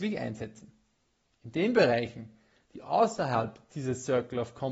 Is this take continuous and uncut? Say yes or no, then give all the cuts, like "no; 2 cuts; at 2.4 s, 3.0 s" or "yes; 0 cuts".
yes; 0 cuts